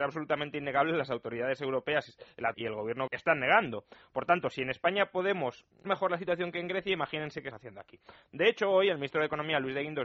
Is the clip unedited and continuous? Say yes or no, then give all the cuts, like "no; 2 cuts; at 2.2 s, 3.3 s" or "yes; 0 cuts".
no; 4 cuts; at 2.5 s, 3.1 s, 5.8 s, 7.5 s